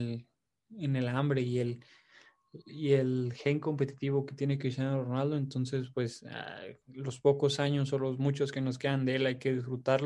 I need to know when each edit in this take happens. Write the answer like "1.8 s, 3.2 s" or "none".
none